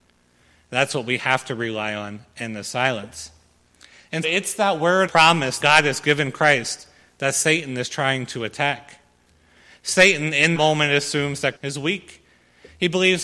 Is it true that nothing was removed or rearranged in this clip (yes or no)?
no